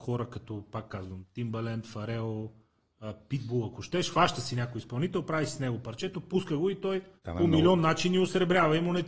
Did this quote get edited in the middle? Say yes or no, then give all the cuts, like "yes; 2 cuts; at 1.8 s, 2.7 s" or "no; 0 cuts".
yes; 1 cut; at 7.2 s